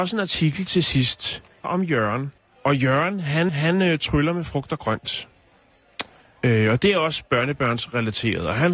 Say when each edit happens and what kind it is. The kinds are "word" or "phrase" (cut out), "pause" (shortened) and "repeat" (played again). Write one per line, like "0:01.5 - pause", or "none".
0:01.6 - phrase
0:02.4 - pause
0:03.5 - repeat